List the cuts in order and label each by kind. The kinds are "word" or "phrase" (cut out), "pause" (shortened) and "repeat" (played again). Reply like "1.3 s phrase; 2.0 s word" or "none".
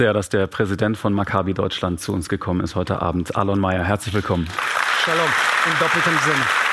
none